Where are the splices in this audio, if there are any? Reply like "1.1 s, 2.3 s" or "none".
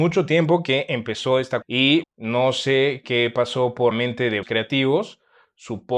1.6 s, 2.0 s, 3.0 s, 3.9 s, 4.4 s